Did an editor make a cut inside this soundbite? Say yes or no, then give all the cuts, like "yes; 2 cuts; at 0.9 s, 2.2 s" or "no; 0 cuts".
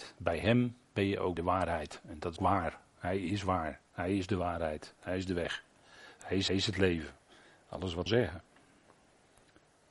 yes; 4 cuts; at 1.4 s, 2.4 s, 6.5 s, 8.1 s